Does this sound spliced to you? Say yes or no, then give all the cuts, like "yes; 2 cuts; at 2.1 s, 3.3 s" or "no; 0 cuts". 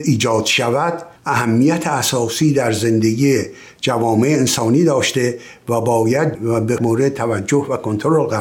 yes; 3 cuts; at 1.2 s, 6.3 s, 6.8 s